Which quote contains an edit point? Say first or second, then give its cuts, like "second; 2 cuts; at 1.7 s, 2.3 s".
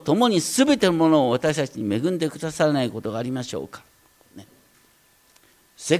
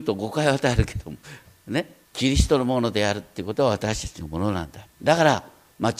second; 3 cuts; at 1.2 s, 2.0 s, 4.9 s